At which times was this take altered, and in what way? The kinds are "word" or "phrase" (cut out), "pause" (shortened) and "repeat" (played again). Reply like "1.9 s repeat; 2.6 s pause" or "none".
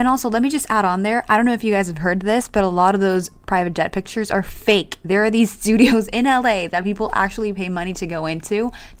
none